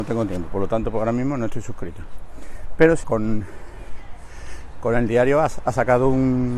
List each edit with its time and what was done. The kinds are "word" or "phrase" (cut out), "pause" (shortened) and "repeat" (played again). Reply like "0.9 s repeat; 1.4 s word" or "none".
3.0 s word